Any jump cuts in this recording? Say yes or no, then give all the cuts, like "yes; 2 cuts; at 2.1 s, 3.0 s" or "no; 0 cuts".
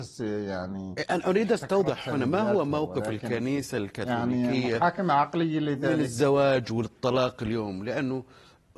no; 0 cuts